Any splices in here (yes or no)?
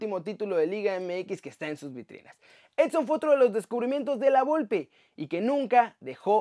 no